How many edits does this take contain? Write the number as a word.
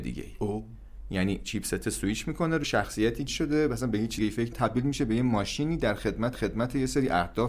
five